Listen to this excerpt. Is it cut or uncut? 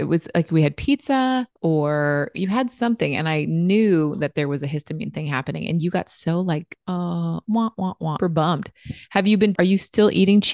cut